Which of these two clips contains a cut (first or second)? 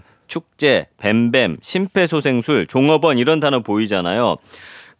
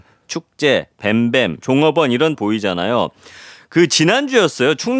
second